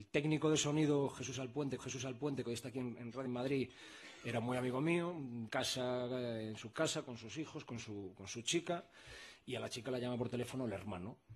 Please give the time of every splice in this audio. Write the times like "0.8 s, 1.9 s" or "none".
1.8 s, 3.2 s, 5.5 s